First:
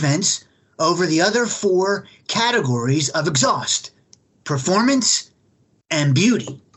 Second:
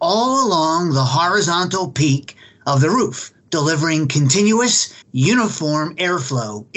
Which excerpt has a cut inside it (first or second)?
second